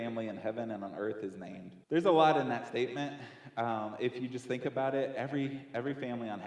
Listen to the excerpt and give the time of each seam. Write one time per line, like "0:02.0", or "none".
0:01.8